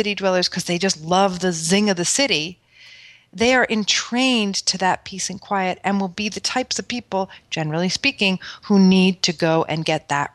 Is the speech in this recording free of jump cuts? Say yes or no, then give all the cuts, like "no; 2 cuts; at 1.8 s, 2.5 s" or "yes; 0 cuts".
yes; 0 cuts